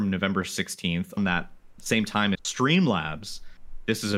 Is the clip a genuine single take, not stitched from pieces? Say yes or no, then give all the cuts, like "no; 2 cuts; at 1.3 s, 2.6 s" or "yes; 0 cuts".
no; 3 cuts; at 1.2 s, 1.8 s, 2.3 s